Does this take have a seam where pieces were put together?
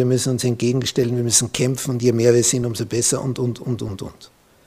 no; 0 cuts

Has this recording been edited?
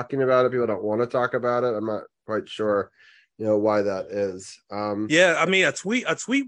no; 0 cuts

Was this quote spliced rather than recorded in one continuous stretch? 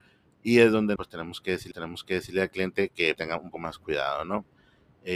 yes; 4 cuts; at 1.0 s, 1.7 s, 3.1 s, 3.5 s

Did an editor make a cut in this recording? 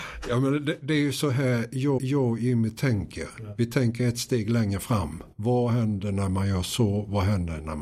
yes; 2 cuts; at 2.0 s, 5.3 s

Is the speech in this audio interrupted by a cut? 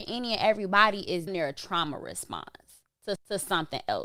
yes; 2 cuts; at 1.3 s, 3.1 s

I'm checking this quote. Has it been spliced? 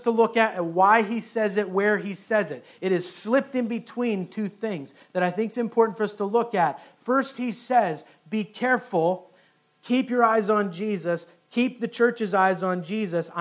no; 0 cuts

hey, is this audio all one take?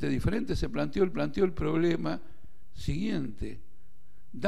no; 1 cut; at 1.1 s

